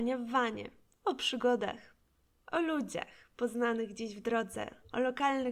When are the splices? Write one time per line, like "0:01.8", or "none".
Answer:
none